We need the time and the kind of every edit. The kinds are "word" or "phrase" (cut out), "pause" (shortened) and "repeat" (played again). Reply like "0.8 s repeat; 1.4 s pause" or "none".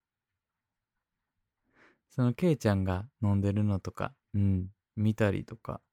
3.1 s pause; 4.2 s pause